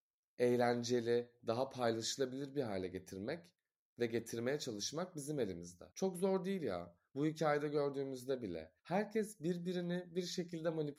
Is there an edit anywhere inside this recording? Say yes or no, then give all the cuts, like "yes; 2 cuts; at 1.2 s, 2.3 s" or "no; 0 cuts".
yes; 2 cuts; at 5.9 s, 8.8 s